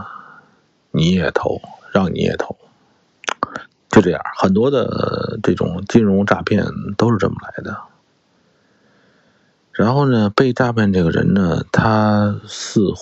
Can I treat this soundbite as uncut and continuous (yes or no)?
yes